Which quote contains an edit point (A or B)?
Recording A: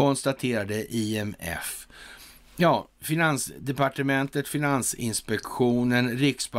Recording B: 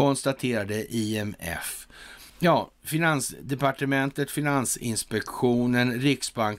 B